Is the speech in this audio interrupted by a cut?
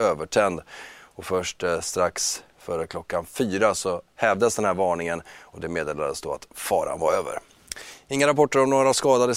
no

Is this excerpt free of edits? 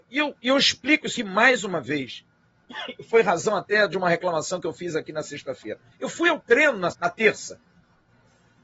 no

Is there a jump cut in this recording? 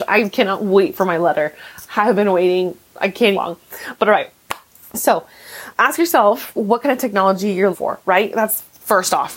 yes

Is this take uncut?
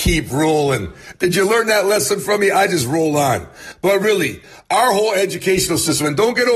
yes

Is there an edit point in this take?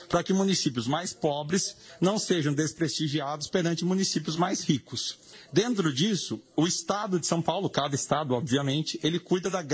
no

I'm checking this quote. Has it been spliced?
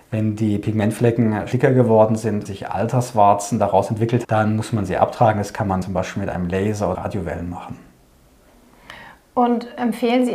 yes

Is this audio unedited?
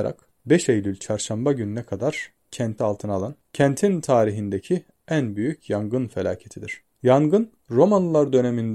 no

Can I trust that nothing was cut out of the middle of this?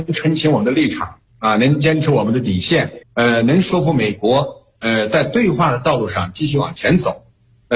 no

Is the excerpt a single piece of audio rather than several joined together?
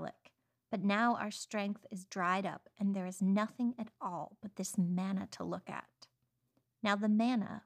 yes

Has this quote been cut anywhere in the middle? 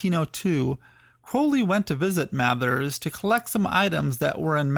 no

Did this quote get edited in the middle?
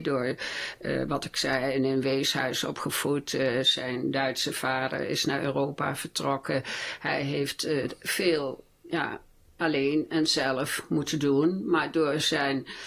no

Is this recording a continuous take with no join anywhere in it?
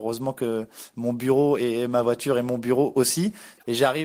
yes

